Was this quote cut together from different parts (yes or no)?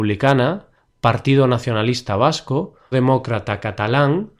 yes